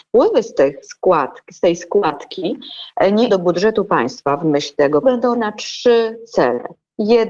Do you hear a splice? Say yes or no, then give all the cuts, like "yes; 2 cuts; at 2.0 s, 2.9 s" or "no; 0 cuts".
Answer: yes; 3 cuts; at 3.3 s, 5.0 s, 5.3 s